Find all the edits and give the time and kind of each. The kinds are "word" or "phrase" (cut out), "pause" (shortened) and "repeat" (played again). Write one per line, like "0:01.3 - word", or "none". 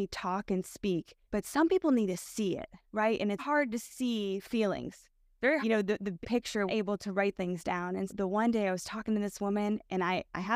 0:01.2 - pause
0:02.9 - pause
0:03.4 - word
0:05.6 - phrase
0:06.2 - word
0:06.7 - phrase
0:07.3 - phrase
0:08.1 - word